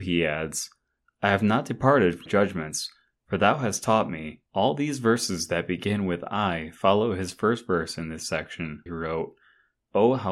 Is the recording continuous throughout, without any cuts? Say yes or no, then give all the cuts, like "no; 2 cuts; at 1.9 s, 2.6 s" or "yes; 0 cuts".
no; 3 cuts; at 2.3 s, 4.5 s, 8.9 s